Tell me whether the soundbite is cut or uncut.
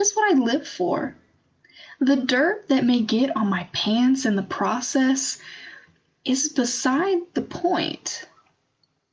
uncut